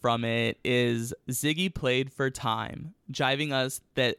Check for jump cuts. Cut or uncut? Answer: uncut